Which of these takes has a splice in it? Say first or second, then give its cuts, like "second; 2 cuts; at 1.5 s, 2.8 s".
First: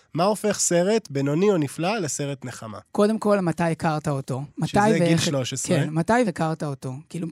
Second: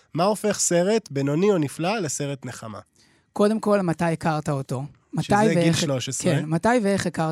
first; 3 cuts; at 2.9 s, 4.5 s, 6.2 s